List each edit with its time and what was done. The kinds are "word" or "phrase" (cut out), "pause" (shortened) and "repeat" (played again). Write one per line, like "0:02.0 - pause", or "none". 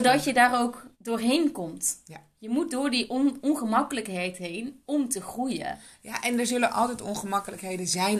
0:00.9 - pause